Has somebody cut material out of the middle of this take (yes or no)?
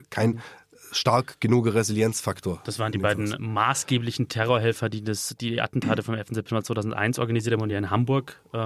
no